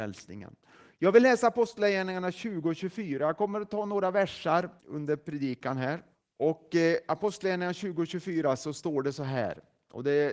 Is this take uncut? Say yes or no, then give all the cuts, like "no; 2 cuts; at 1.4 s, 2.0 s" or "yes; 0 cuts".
no; 2 cuts; at 4.8 s, 6.1 s